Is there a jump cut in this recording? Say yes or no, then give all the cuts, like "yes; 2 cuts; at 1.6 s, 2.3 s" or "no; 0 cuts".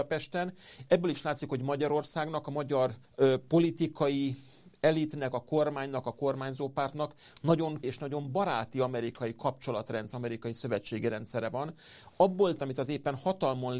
yes; 4 cuts; at 3.0 s, 7.8 s, 10.1 s, 12.6 s